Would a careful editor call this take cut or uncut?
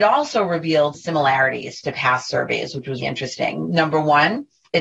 cut